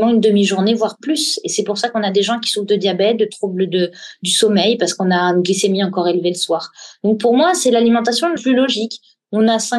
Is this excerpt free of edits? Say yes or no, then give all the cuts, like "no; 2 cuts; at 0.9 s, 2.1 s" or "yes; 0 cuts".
no; 1 cut; at 8.4 s